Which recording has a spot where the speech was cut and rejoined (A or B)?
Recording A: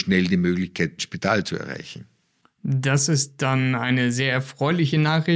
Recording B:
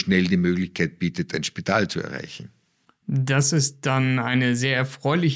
A